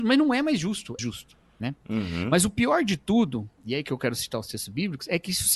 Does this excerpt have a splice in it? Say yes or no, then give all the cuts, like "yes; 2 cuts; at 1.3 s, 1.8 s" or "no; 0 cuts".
yes; 2 cuts; at 1.0 s, 3.5 s